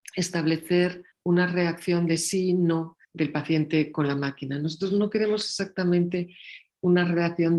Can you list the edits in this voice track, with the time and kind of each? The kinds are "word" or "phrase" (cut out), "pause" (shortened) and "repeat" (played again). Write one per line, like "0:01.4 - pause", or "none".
0:01.1 - pause
0:03.0 - pause